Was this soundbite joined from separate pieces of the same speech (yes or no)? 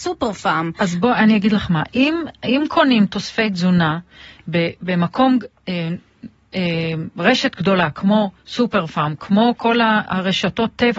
no